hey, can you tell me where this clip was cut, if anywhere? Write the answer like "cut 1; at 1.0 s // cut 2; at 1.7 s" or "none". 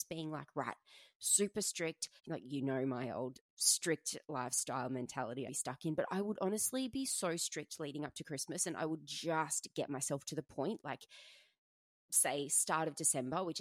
cut 1; at 2.2 s // cut 2; at 5.5 s

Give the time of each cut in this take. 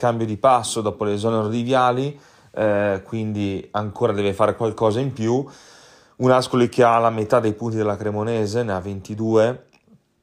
none

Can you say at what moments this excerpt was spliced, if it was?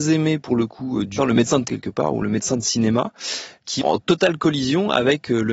cut 1; at 1.2 s // cut 2; at 1.7 s // cut 3; at 3.8 s

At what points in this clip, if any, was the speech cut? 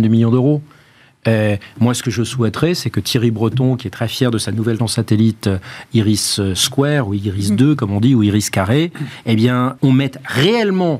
cut 1; at 4.8 s // cut 2; at 9.8 s

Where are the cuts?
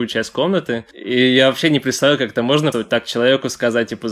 cut 1; at 2.7 s

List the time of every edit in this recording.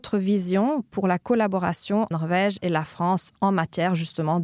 cut 1; at 2.1 s

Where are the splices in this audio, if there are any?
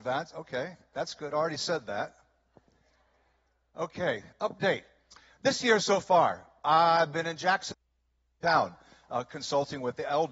none

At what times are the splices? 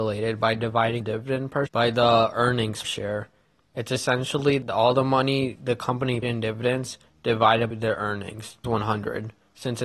cut 1; at 1.0 s // cut 2; at 1.7 s // cut 3; at 2.8 s // cut 4; at 6.2 s // cut 5; at 7.7 s // cut 6; at 8.6 s

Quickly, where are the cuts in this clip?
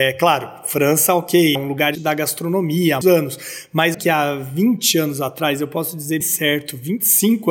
cut 1; at 1.6 s // cut 2; at 2.0 s // cut 3; at 3.0 s // cut 4; at 3.9 s // cut 5; at 6.2 s

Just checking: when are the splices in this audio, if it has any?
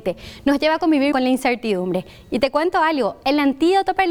cut 1; at 1.1 s

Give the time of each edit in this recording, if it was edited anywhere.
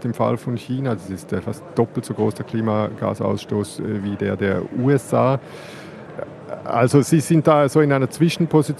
none

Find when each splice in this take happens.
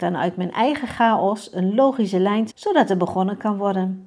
cut 1; at 2.5 s

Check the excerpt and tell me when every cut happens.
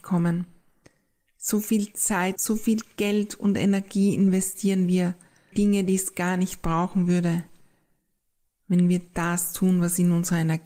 cut 1; at 2.4 s // cut 2; at 5.5 s

